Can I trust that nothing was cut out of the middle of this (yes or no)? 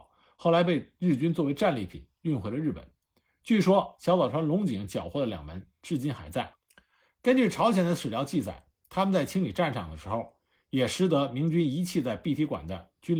yes